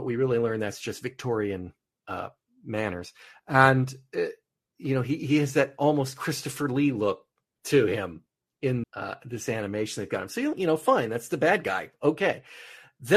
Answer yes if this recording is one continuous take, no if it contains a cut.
no